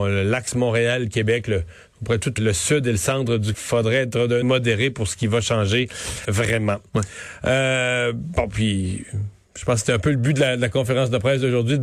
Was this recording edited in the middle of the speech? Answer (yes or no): yes